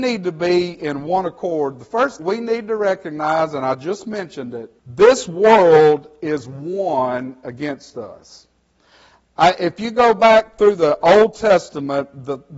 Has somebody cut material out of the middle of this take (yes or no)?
yes